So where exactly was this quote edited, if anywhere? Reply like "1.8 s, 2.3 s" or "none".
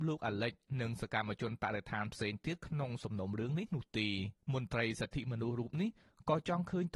4.4 s

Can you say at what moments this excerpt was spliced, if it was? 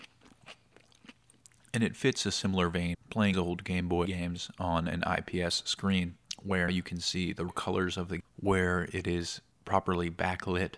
2.9 s, 3.3 s, 4.1 s, 6.7 s, 7.5 s, 8.2 s

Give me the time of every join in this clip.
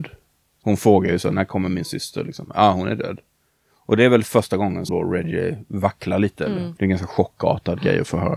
4.9 s

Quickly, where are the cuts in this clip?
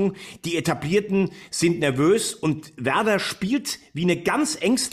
none

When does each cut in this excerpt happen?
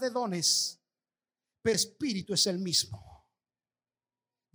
1.7 s

